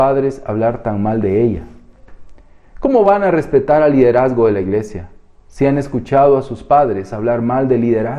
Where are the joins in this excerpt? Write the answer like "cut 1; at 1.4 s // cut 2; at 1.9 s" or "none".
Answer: none